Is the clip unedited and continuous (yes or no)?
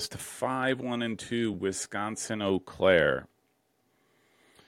yes